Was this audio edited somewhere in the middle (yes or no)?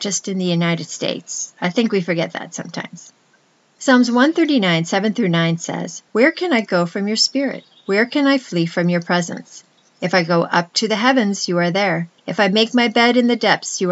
yes